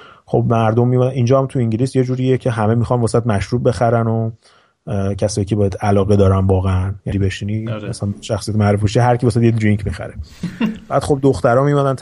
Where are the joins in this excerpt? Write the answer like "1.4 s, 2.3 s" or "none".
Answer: 7.1 s